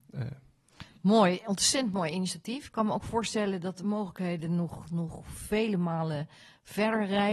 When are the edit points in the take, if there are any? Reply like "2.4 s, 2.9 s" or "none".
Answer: none